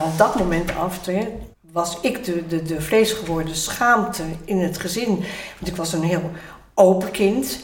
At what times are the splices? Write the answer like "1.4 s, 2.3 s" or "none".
1.5 s